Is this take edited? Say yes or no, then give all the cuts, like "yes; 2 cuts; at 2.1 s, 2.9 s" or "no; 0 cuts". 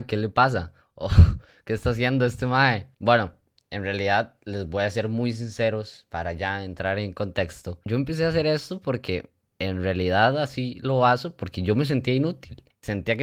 no; 0 cuts